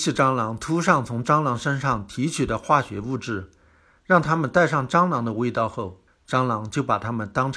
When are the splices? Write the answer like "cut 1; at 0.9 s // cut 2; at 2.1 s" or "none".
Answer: cut 1; at 6.1 s